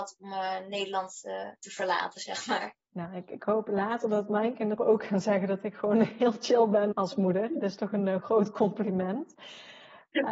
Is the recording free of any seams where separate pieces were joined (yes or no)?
no